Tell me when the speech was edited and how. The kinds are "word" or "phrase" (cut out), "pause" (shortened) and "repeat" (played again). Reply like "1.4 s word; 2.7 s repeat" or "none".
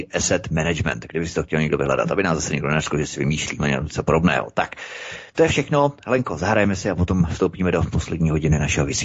none